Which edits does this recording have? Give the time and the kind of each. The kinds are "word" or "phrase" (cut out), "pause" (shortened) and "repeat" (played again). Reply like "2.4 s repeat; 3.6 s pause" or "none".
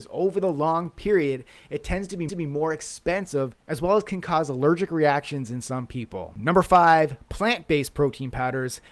2.3 s repeat